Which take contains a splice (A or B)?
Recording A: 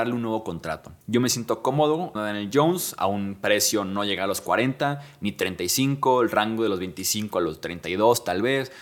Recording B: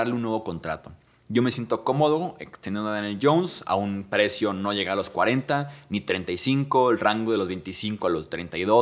A